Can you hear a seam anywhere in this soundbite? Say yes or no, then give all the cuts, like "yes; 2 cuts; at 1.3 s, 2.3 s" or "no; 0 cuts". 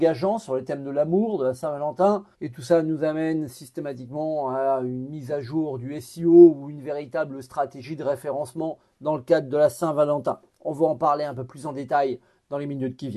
yes; 1 cut; at 2.3 s